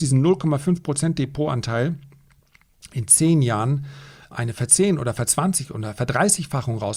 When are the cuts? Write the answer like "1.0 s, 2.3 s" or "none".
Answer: 4.3 s

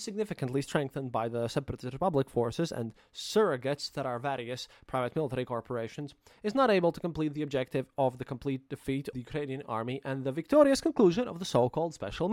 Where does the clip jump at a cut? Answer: 9.1 s

